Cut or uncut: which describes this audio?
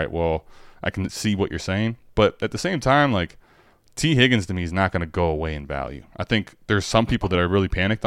uncut